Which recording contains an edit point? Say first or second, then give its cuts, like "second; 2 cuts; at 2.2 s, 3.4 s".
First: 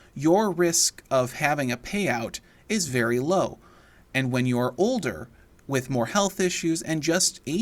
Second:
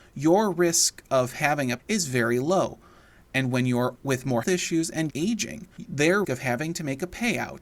second; 5 cuts; at 1.8 s, 4.0 s, 4.4 s, 5.1 s, 6.2 s